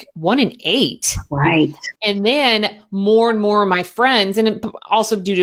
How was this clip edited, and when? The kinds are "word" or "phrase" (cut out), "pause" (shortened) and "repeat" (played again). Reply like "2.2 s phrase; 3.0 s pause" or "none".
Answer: 2.0 s pause